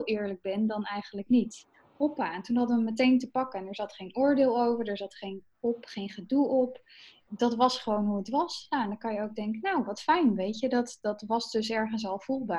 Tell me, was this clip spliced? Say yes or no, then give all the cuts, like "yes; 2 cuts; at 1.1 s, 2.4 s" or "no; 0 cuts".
no; 0 cuts